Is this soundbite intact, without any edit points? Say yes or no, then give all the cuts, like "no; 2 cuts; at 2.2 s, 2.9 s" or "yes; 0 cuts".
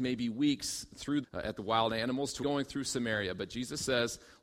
no; 3 cuts; at 1.2 s, 1.6 s, 2.4 s